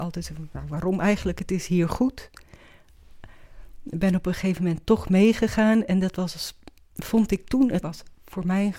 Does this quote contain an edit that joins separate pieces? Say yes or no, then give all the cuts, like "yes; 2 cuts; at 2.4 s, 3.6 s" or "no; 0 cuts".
yes; 1 cut; at 7.8 s